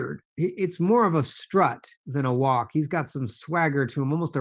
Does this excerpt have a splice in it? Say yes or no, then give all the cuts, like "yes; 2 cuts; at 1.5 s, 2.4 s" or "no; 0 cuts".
yes; 1 cut; at 2.0 s